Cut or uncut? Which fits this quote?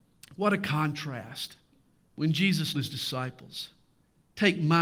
cut